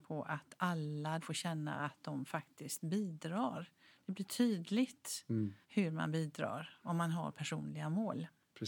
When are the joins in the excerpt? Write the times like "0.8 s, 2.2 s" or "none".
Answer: 1.2 s, 5.6 s